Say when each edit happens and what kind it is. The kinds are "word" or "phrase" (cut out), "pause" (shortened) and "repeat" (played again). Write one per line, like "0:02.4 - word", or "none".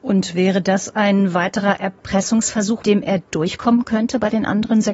0:02.8 - word